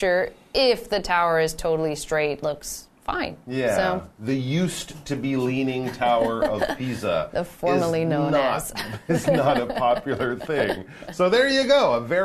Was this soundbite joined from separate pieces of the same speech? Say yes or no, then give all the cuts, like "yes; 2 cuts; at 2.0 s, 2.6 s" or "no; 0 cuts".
yes; 1 cut; at 2.4 s